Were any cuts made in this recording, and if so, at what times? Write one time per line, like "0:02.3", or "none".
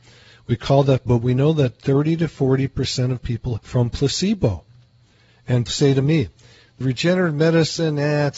0:01.1
0:03.6
0:05.7
0:06.8